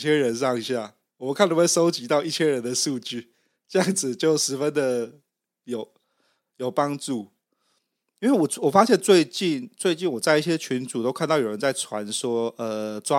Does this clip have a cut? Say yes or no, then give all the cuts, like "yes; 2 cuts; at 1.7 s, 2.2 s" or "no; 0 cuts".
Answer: no; 0 cuts